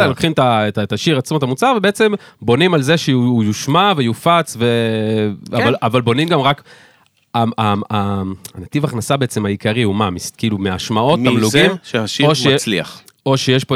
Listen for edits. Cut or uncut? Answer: uncut